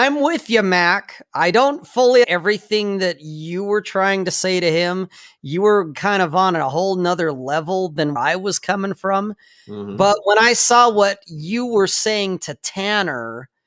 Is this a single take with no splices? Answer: no; 2 cuts; at 2.2 s, 8.2 s

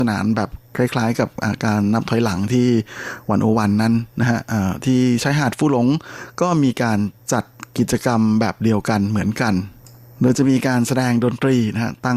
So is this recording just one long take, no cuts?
yes; 0 cuts

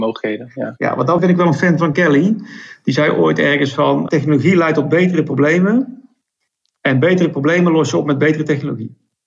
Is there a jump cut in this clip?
yes; 3 cuts; at 1.2 s, 1.9 s, 4.1 s

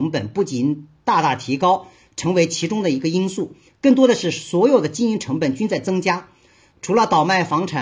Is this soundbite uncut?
yes; 0 cuts

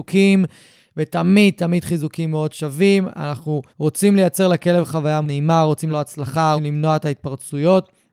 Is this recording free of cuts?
no; 4 cuts; at 3.7 s, 5.2 s, 5.9 s, 6.6 s

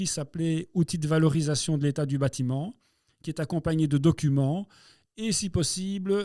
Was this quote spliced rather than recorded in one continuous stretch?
no; 0 cuts

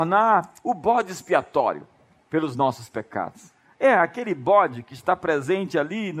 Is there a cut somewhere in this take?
no; 0 cuts

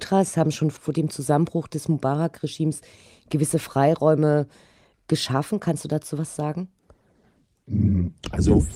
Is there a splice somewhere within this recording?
no; 0 cuts

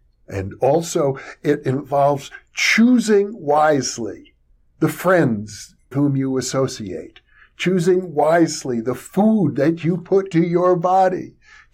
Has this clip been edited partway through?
yes; 2 cuts; at 5.9 s, 10.3 s

